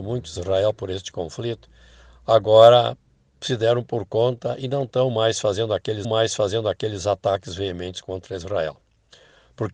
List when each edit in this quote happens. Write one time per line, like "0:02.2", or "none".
0:06.0